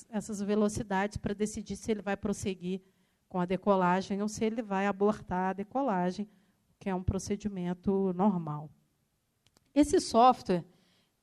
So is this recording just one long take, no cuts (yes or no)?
yes